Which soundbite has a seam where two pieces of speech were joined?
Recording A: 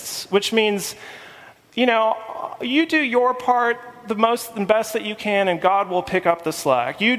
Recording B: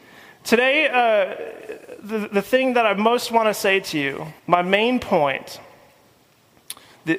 B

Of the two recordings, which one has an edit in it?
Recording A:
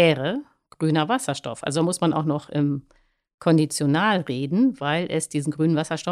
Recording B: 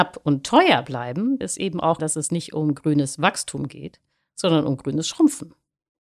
B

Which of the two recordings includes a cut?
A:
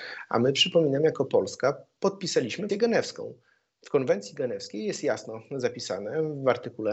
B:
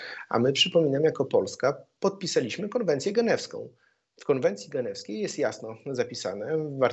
A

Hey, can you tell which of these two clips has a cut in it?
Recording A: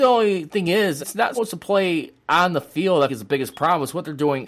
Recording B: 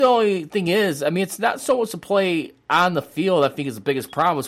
A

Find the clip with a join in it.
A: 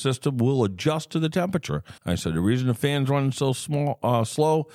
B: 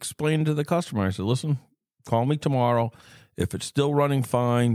A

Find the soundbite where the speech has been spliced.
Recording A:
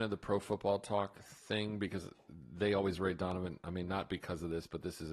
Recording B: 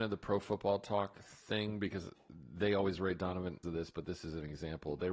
B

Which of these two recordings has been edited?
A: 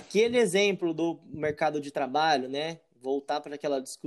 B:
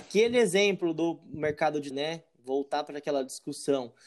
B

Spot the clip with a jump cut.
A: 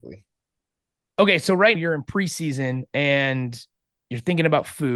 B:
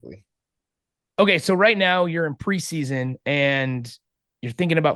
A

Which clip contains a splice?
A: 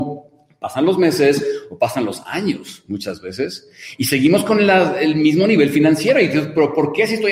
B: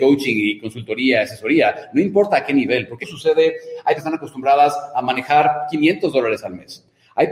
B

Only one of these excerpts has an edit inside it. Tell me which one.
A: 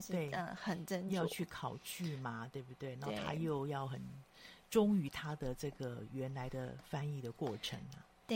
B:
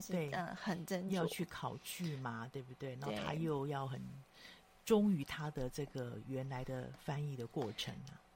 A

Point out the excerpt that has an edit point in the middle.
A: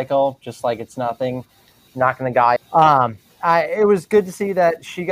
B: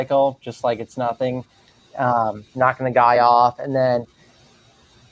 A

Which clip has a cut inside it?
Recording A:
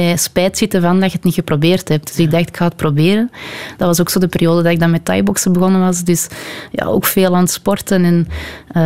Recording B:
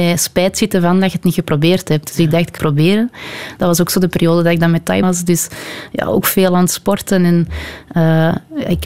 B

